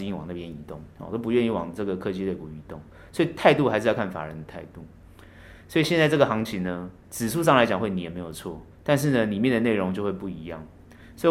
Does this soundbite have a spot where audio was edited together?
yes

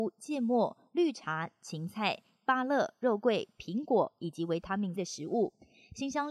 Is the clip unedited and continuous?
no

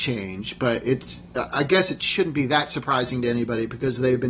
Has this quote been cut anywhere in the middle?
no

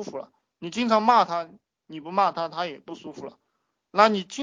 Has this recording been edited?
no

